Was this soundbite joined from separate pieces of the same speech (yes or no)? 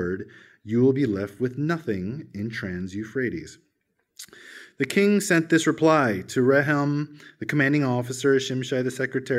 no